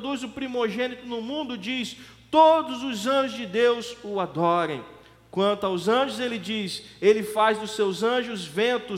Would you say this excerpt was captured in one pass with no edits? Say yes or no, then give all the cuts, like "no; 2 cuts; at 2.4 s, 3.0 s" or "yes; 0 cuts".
yes; 0 cuts